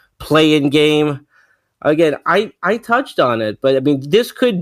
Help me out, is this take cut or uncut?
uncut